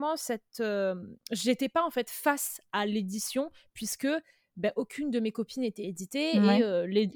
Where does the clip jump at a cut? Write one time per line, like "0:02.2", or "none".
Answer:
0:01.2

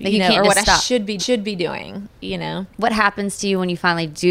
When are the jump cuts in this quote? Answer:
0:01.2

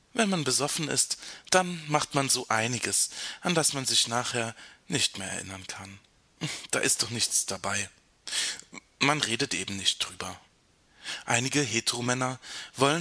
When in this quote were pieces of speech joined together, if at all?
none

